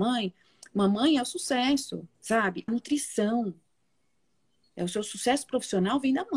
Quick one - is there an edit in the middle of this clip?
yes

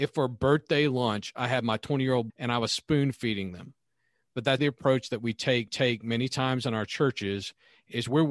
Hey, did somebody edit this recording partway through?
yes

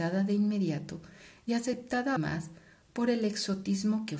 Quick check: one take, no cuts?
no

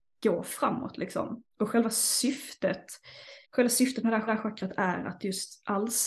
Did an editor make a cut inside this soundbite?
yes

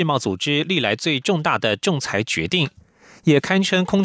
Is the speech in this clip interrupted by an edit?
no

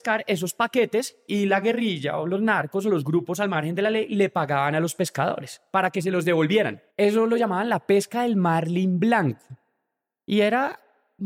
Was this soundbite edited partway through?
yes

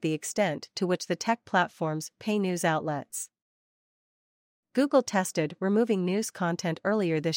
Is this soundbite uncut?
yes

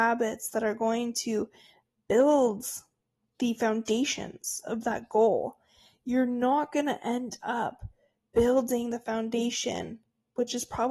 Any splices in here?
no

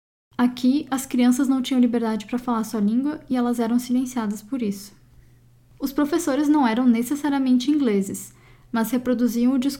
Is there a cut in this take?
no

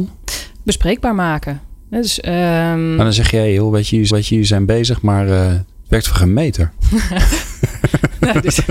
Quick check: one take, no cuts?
no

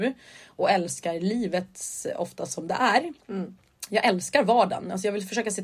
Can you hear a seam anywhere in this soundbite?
no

